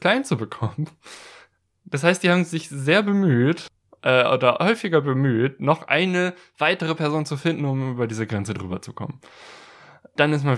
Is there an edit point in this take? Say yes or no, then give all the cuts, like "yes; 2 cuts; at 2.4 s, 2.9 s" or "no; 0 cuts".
no; 0 cuts